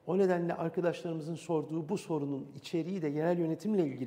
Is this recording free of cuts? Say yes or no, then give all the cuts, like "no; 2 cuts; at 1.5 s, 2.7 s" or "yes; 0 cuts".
yes; 0 cuts